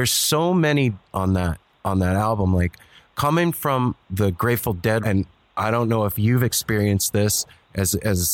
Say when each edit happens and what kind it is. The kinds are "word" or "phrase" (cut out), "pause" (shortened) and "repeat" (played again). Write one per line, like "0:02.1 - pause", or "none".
0:01.1 - phrase
0:04.0 - word
0:05.0 - word